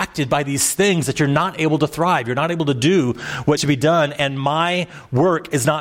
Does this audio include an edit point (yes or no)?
yes